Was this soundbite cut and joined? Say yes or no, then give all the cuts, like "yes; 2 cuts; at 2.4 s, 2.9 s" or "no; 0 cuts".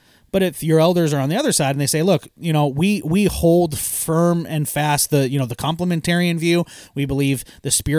no; 0 cuts